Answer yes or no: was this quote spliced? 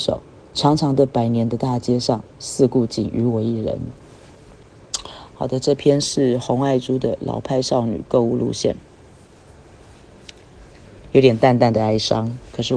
yes